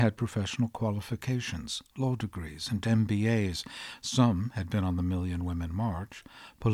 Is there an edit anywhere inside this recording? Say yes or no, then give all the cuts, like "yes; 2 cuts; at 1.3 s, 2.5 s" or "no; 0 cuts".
no; 0 cuts